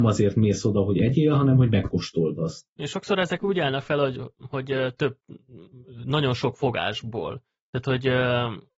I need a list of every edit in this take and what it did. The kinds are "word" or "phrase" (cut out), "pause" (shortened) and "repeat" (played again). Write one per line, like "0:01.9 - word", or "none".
0:07.6 - pause